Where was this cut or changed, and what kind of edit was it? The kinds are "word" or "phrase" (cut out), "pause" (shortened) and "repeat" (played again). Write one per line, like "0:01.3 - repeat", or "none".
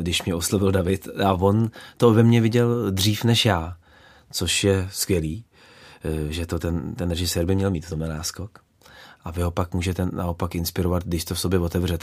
none